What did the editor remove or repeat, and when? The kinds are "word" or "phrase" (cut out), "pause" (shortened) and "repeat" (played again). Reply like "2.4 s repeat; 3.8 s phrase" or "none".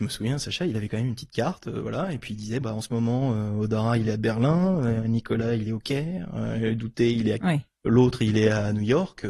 2.6 s word; 7.4 s word